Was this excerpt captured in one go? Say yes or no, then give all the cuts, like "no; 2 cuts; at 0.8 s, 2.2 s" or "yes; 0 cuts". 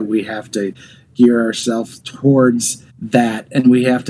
no; 1 cut; at 2.9 s